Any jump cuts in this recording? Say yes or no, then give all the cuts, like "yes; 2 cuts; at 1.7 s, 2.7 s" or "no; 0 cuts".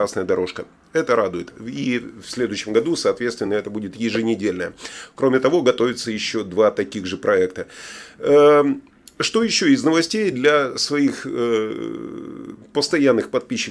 no; 0 cuts